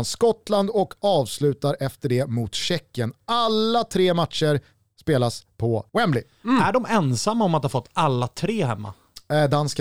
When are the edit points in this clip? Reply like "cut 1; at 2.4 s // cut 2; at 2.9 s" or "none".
cut 1; at 5.9 s